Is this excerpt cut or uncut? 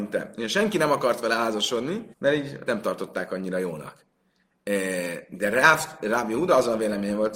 cut